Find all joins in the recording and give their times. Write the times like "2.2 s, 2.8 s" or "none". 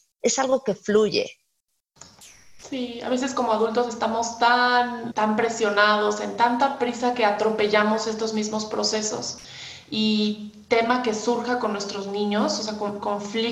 5.1 s

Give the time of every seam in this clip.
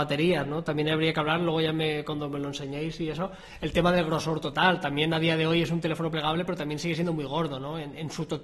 none

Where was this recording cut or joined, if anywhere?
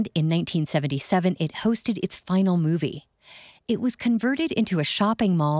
none

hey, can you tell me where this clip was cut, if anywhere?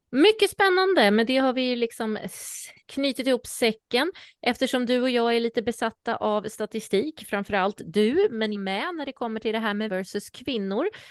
2.8 s, 8.5 s, 9.9 s

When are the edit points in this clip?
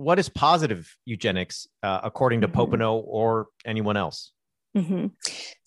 1.0 s

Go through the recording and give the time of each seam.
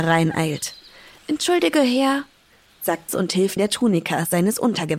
3.1 s, 3.6 s

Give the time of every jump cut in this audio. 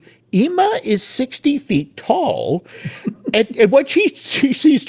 none

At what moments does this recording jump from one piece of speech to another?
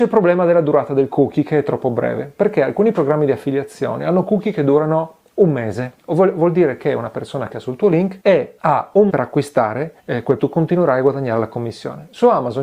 6.0 s, 7.5 s, 8.2 s, 9.1 s, 10.0 s, 10.4 s

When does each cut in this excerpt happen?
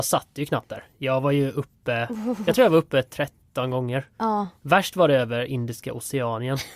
4.1 s

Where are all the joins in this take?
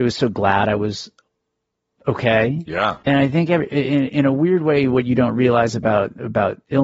3.0 s

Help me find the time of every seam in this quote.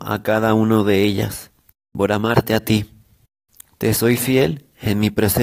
none

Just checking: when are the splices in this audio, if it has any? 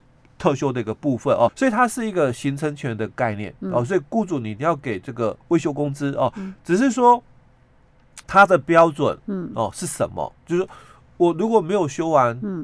1.5 s, 5.4 s, 8.2 s, 10.4 s

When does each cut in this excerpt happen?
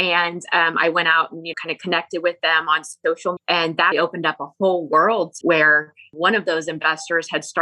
1.5 s, 3.4 s, 3.9 s, 5.4 s

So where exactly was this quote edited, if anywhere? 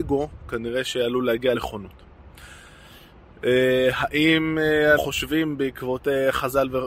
1.5 s, 5.0 s

